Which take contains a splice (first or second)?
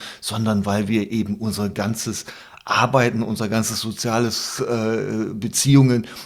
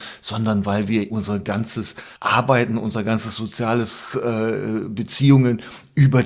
second